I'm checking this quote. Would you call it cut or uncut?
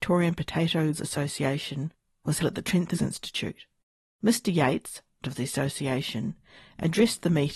cut